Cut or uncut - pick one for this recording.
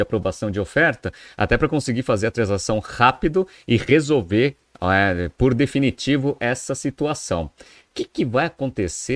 uncut